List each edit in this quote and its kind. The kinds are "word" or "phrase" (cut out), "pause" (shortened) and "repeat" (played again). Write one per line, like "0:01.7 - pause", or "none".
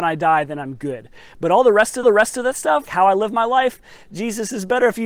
0:02.0 - repeat
0:02.9 - word